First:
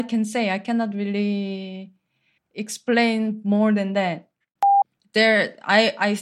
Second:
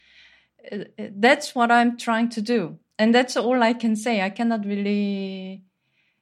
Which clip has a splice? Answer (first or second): first